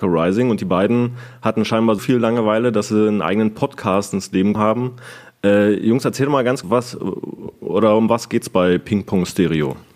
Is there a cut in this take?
yes; 3 cuts; at 2.0 s, 4.6 s, 6.6 s

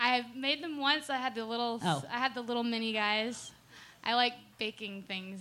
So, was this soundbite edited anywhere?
no; 0 cuts

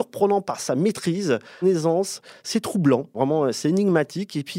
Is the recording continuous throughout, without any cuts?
no; 2 cuts; at 1.6 s, 3.1 s

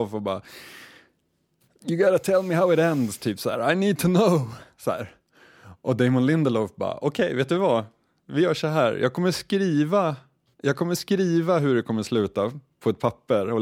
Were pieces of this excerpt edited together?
no; 0 cuts

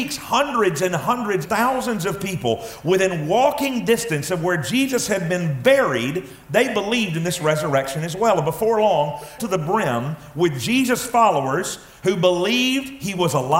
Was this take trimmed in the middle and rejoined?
yes; 2 cuts; at 1.4 s, 9.4 s

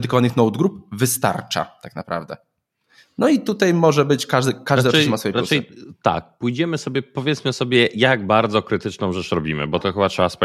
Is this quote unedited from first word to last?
yes; 0 cuts

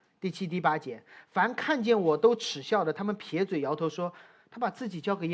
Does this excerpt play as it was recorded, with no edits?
yes; 0 cuts

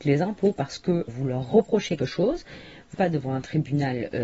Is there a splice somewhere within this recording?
yes; 3 cuts; at 1.1 s, 2.0 s, 2.9 s

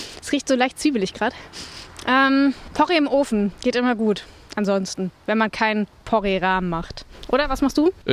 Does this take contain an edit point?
no; 0 cuts

